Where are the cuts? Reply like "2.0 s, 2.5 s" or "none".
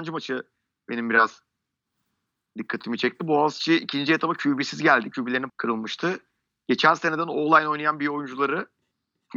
5.5 s